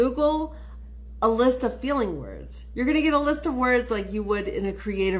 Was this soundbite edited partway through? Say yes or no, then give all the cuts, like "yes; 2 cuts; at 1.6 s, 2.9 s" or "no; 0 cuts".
no; 0 cuts